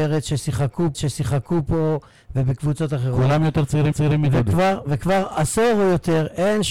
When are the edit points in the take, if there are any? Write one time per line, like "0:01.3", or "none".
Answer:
0:00.9
0:03.9